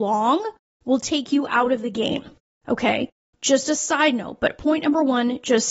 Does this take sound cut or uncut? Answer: uncut